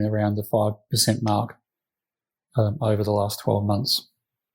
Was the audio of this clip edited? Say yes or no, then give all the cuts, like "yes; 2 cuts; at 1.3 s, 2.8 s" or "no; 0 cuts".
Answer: no; 0 cuts